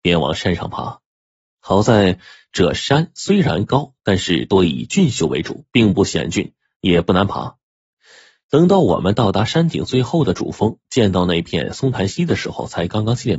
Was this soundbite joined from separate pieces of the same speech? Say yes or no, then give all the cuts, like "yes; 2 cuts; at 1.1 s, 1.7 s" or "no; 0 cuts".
no; 0 cuts